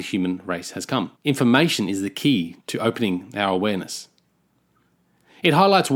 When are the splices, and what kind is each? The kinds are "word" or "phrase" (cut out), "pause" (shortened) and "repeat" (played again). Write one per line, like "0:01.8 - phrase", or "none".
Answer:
0:01.2 - pause
0:02.6 - pause

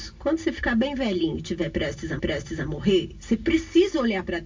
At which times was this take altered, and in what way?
0:02.2 - repeat

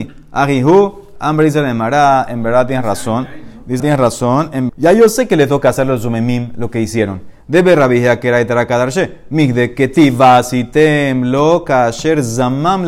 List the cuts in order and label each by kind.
0:03.8 - phrase
0:04.7 - phrase

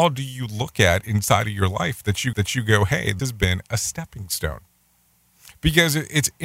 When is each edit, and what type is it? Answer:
0:02.3 - repeat
0:03.2 - word
0:05.2 - pause

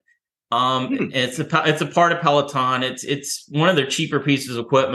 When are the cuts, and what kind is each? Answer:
none

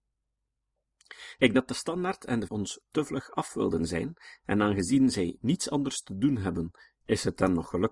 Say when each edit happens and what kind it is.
0:01.5 - word
0:02.5 - word

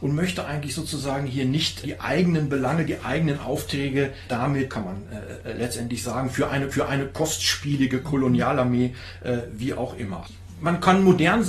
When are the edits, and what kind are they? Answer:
0:01.8 - word
0:04.3 - word
0:04.7 - phrase
0:06.7 - repeat

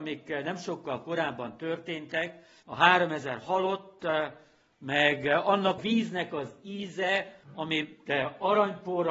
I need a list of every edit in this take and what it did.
0:02.6 - pause
0:05.8 - word
0:07.4 - pause

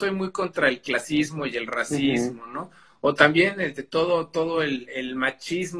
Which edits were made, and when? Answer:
none

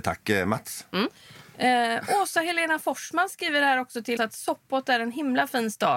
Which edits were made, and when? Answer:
0:04.2 - word

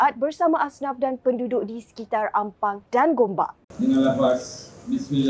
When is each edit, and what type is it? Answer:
0:02.9 - pause
0:03.6 - pause

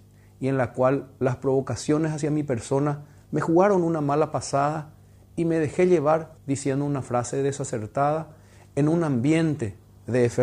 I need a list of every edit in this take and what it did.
0:06.4 - pause

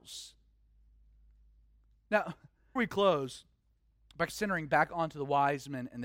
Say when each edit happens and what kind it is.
0:02.8 - word
0:04.3 - word

